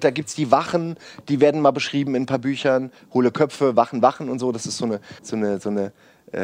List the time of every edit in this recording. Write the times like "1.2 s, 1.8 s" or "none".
5.2 s